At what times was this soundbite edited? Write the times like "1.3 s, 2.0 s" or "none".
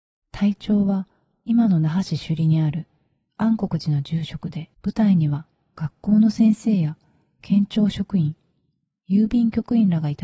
4.7 s